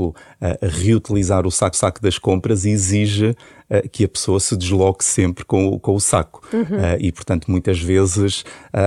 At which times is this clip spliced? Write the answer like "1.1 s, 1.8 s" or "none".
1.7 s